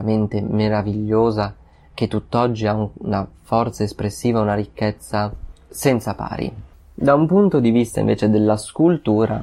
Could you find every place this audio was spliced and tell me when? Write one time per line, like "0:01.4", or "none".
none

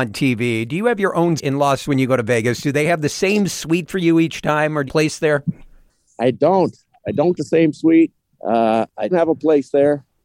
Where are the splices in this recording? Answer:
0:01.4
0:01.8
0:04.9
0:07.4
0:08.3
0:09.1

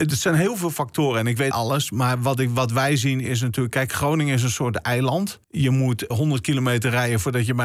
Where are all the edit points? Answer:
0:01.5
0:05.4
0:06.1

